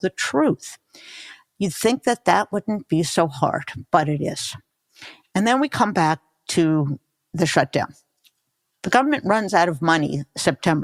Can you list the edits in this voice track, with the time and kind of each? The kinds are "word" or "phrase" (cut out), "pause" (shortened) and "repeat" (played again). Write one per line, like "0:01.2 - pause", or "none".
none